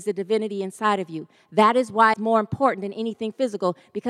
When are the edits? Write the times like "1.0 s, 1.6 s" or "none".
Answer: 2.1 s

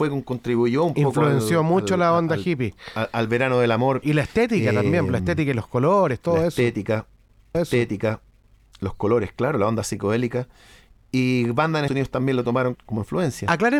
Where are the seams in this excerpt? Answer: 4.0 s, 7.5 s, 11.9 s, 12.8 s

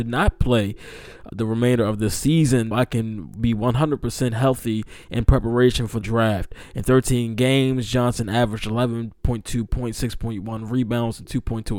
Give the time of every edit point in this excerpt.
1.3 s, 2.7 s, 6.0 s

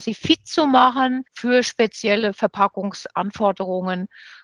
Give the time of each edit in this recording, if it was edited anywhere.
1.3 s

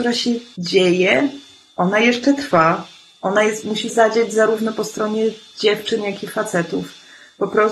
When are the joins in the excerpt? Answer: 3.9 s

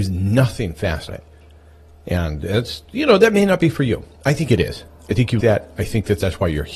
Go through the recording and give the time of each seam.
1.1 s, 5.4 s

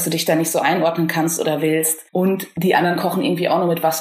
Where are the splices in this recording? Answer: 2.1 s

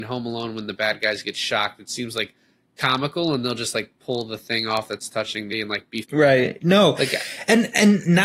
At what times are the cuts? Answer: 5.5 s, 6.0 s

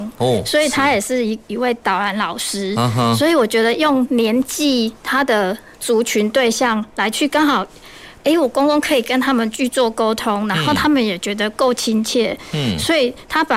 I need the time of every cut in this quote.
none

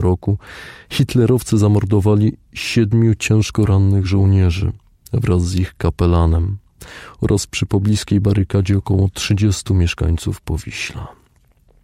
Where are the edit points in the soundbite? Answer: none

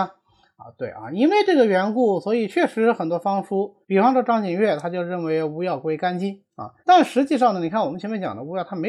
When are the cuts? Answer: 3.8 s, 6.8 s

